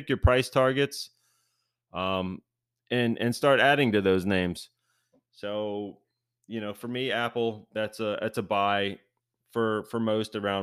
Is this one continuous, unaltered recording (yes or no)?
yes